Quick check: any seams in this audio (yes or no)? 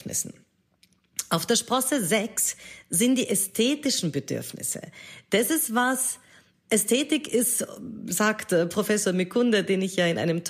no